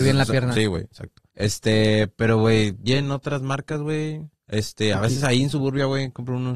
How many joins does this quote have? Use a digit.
3